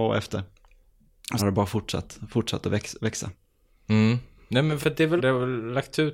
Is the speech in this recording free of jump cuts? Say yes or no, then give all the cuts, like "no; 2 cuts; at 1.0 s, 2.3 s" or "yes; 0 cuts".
no; 3 cuts; at 1.4 s, 4.8 s, 5.2 s